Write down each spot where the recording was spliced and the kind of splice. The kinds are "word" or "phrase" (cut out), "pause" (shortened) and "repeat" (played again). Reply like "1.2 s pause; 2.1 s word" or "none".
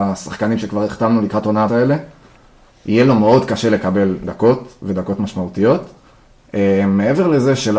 1.7 s phrase

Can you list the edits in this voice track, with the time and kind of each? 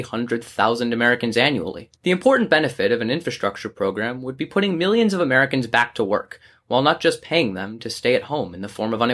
2.0 s pause

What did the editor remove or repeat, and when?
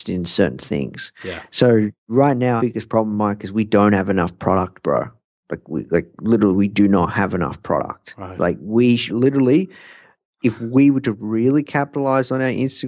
2.6 s word; 9.1 s word

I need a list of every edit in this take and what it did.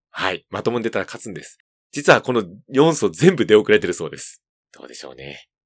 1.7 s pause; 4.5 s pause

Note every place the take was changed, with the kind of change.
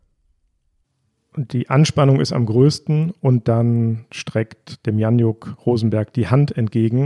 none

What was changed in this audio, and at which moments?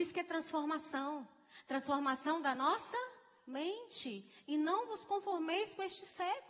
none

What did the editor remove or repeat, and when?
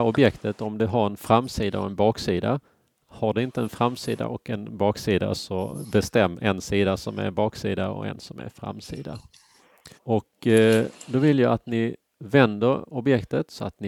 2.7 s pause; 10.0 s pause

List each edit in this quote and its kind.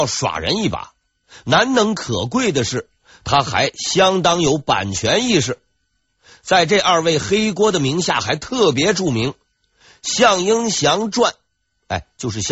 none

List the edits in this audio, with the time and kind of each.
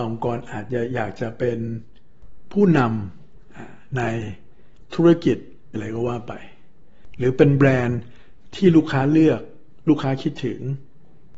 5.7 s word

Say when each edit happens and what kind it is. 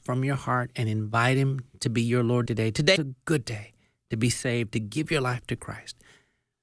2.5 s phrase; 3.0 s word

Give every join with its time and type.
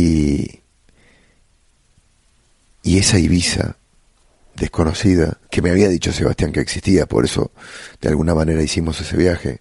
5.4 s pause

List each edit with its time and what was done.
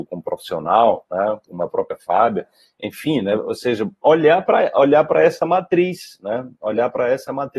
none

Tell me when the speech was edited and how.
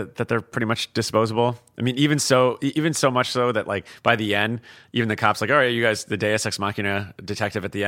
none

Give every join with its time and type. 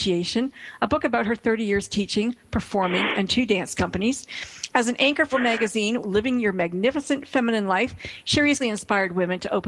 3.3 s word; 5.3 s word; 6.0 s phrase; 8.6 s word

